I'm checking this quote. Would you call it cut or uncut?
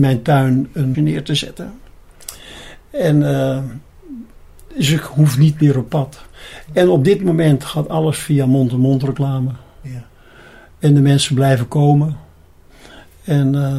cut